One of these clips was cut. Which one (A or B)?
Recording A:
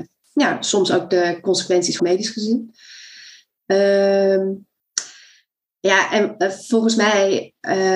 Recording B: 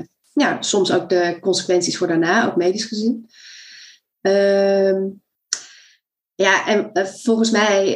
A